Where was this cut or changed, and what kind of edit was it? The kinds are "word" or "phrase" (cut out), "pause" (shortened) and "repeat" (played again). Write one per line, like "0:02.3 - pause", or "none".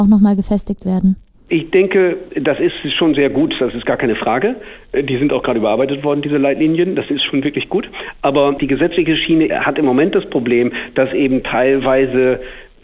none